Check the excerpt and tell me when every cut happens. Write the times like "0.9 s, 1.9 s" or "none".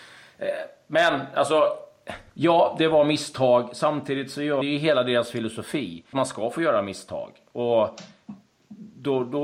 2.3 s, 4.6 s, 6.1 s